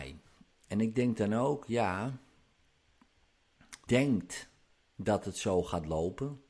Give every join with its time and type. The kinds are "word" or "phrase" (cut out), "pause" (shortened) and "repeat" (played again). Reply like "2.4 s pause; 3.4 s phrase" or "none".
3.9 s word